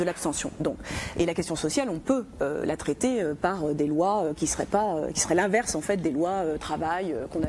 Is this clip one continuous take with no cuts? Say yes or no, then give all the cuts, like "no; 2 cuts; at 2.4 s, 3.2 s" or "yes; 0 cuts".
yes; 0 cuts